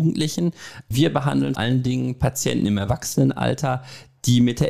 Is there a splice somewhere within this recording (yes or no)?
yes